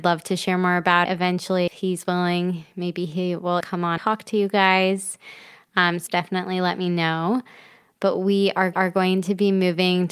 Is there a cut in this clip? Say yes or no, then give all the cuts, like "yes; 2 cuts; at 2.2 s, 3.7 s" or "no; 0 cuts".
yes; 6 cuts; at 1.1 s, 1.7 s, 3.6 s, 4.0 s, 6.1 s, 8.7 s